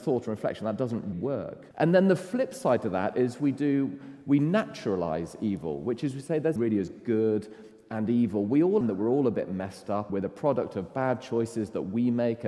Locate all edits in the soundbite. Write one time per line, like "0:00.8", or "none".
0:01.1
0:01.7
0:06.6
0:08.8
0:10.1